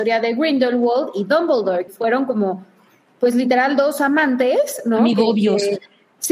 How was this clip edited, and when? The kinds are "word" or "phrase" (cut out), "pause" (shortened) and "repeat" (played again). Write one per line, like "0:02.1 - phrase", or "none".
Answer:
0:01.9 - word